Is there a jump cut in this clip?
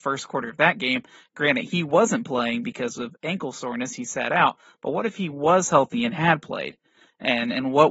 no; 0 cuts

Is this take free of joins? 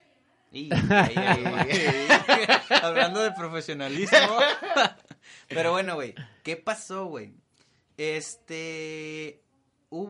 yes; 0 cuts

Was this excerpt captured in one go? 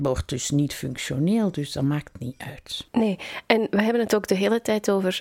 yes; 0 cuts

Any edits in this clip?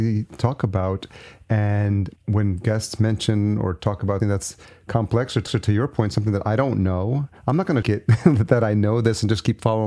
yes; 5 cuts; at 2.2 s, 4.2 s, 5.5 s, 7.4 s, 7.8 s

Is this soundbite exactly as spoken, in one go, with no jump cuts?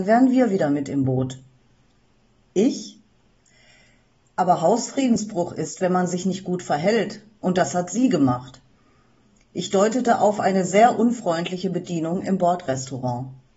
yes; 0 cuts

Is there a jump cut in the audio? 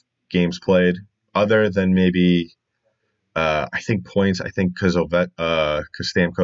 no; 0 cuts

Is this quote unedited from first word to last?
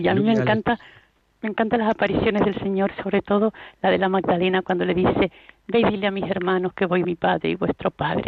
no; 1 cut; at 7.0 s

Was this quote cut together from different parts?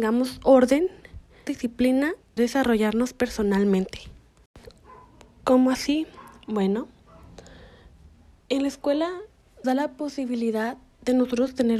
yes; 3 cuts; at 1.5 s, 2.4 s, 9.6 s

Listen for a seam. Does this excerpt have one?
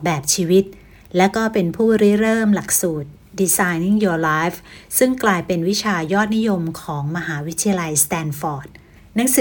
no; 0 cuts

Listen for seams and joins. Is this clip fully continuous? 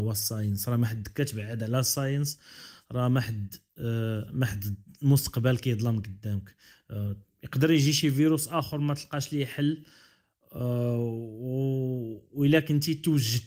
yes; 0 cuts

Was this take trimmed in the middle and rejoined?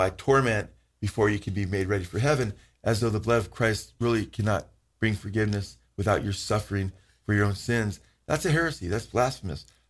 no; 0 cuts

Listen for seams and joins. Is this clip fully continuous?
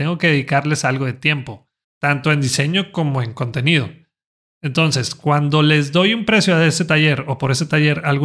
yes; 0 cuts

